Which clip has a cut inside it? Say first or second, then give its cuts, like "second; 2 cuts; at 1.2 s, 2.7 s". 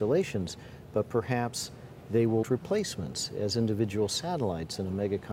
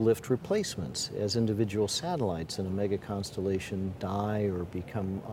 first; 1 cut; at 2.4 s